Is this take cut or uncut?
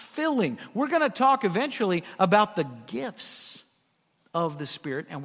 uncut